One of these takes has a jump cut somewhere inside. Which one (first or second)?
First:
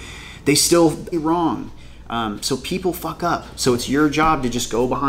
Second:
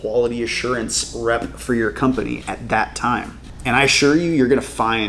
first